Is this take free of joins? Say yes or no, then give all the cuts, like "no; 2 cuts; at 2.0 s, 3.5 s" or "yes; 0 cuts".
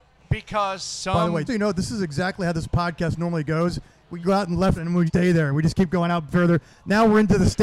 no; 4 cuts; at 1.5 s, 4.2 s, 4.8 s, 5.1 s